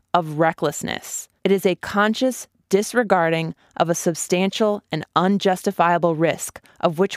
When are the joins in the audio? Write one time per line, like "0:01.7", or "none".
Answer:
0:01.4